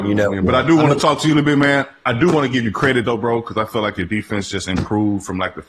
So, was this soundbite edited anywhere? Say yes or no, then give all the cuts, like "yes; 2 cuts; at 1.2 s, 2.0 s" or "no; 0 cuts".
no; 0 cuts